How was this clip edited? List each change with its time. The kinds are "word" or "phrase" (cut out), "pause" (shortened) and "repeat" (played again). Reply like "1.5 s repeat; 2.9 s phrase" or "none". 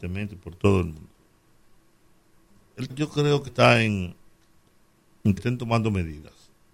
2.9 s word; 3.5 s word; 5.4 s word